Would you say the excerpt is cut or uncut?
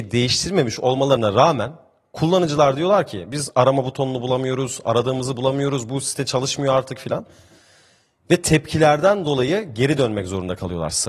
uncut